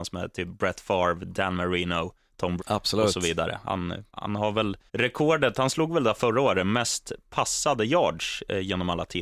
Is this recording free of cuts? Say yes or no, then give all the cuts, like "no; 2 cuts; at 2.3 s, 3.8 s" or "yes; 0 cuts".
no; 3 cuts; at 2.6 s, 4.1 s, 4.9 s